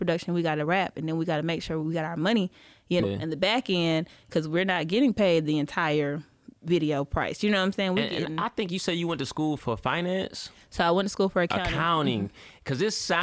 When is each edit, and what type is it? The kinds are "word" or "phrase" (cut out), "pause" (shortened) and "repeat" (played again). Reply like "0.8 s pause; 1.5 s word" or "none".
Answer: 3.0 s word; 9.6 s word